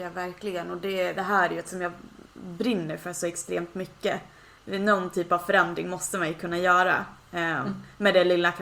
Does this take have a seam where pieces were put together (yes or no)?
yes